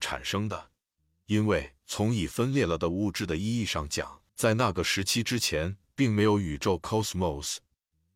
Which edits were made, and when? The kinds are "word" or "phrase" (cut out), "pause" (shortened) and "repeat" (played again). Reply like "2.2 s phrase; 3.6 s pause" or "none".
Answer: 1.8 s pause; 4.3 s pause